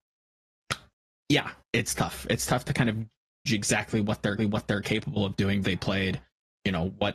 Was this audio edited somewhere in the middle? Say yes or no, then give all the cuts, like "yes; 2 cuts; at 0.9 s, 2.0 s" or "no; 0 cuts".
yes; 4 cuts; at 1.6 s, 3.5 s, 4.4 s, 5.6 s